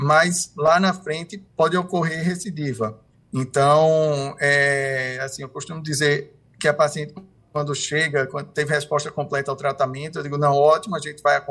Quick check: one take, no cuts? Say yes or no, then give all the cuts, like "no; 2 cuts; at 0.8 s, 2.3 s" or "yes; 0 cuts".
no; 2 cuts; at 1.5 s, 3.1 s